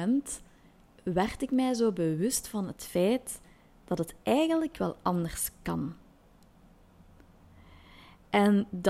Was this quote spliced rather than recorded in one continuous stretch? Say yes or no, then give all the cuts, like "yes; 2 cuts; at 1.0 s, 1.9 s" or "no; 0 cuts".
no; 0 cuts